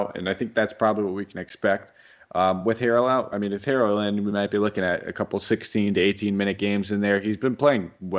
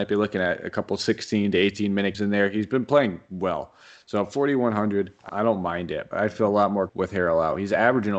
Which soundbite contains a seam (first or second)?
second